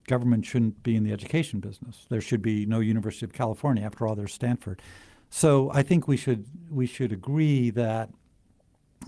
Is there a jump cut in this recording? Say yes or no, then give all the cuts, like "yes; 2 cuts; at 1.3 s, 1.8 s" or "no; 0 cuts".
no; 0 cuts